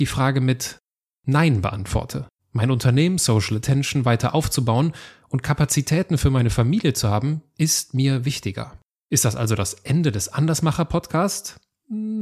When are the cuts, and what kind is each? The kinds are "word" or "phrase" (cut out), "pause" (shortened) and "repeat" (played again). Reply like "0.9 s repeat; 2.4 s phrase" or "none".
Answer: 2.4 s pause; 8.9 s pause